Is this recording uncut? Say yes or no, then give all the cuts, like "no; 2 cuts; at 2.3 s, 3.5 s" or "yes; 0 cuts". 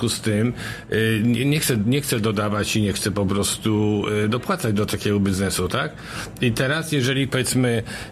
yes; 0 cuts